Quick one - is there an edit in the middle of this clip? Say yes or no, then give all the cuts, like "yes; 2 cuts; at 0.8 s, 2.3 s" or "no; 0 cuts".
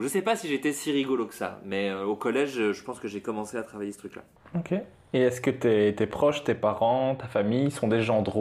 no; 0 cuts